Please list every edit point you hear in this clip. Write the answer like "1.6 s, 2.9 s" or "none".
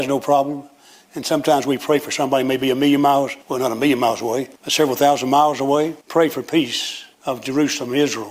3.4 s, 4.6 s, 6.0 s, 7.1 s